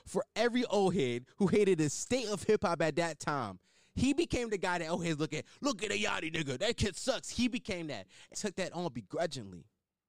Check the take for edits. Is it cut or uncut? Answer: cut